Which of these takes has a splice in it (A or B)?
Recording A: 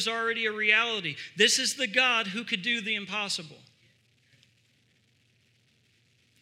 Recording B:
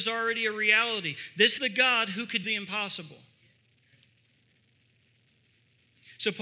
B